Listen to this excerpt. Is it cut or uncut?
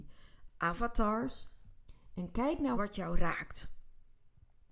cut